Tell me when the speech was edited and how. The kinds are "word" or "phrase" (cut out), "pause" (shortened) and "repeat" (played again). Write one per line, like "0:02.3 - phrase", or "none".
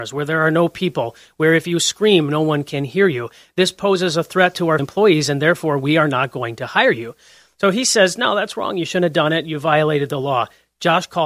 0:04.8 - word